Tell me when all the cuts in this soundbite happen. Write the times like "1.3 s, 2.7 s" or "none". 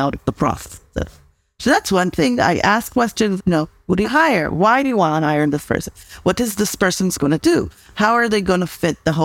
3.4 s, 4.0 s